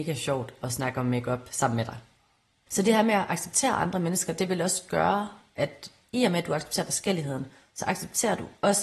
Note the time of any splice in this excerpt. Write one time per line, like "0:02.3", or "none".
none